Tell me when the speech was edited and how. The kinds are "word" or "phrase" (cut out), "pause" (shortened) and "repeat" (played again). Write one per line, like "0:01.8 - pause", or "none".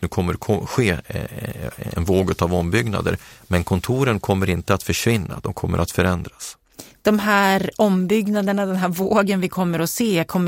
0:02.0 - word